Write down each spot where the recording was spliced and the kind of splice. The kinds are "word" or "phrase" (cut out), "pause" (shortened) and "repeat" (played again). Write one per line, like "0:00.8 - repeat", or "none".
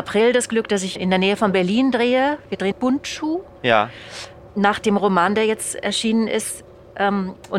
0:01.0 - word
0:02.7 - phrase